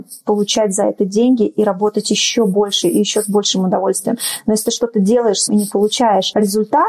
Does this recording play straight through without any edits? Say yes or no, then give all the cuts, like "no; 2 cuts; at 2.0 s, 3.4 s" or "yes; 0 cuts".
no; 1 cut; at 5.5 s